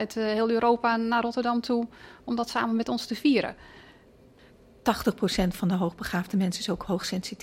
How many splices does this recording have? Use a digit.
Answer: 0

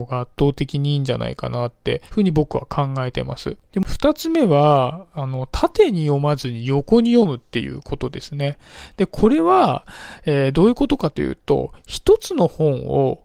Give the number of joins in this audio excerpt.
2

